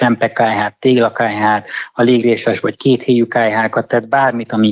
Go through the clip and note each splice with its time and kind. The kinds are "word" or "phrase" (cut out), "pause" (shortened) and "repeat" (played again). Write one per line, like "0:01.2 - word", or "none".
none